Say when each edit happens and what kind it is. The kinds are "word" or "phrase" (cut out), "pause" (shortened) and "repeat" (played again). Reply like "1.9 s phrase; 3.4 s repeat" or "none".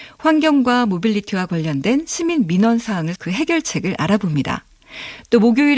3.2 s word